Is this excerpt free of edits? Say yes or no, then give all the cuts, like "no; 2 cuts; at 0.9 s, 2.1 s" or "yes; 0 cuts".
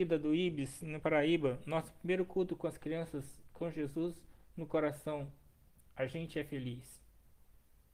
yes; 0 cuts